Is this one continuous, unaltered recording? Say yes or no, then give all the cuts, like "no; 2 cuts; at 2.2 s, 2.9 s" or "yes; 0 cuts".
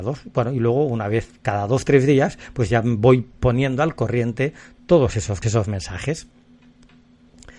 no; 1 cut; at 5.4 s